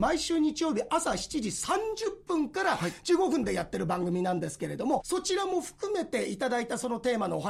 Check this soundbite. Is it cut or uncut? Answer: cut